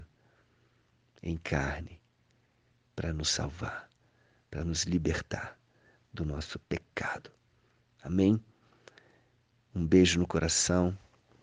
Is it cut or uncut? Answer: uncut